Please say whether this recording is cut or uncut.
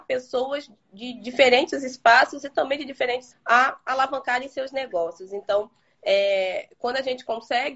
cut